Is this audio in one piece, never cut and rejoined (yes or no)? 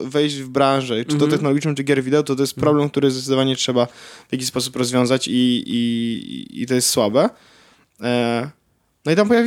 yes